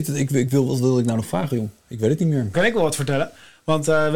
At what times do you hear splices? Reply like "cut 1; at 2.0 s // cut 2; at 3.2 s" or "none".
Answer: cut 1; at 1.8 s // cut 2; at 2.5 s